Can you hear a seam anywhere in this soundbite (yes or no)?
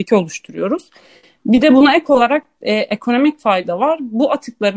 no